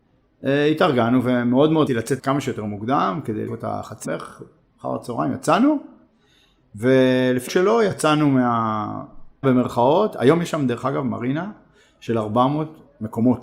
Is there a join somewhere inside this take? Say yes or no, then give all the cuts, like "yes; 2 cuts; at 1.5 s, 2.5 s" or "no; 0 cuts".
yes; 6 cuts; at 1.9 s, 2.2 s, 3.5 s, 4.0 s, 7.5 s, 9.4 s